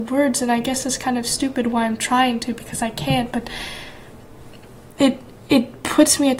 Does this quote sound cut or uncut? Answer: uncut